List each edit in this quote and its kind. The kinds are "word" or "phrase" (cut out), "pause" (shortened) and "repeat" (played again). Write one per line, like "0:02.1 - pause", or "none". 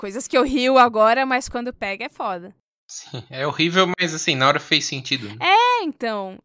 0:02.6 - pause